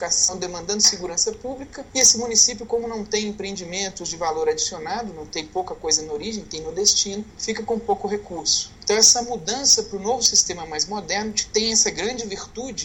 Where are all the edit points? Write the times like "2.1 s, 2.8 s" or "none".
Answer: none